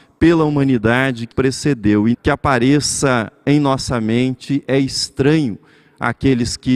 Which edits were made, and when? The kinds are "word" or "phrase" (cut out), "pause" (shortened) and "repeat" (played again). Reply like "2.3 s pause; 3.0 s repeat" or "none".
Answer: 1.3 s word; 2.1 s word